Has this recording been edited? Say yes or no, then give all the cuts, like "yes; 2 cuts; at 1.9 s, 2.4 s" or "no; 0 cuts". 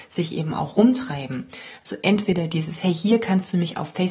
no; 0 cuts